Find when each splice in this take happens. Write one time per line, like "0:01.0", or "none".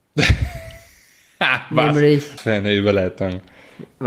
0:02.4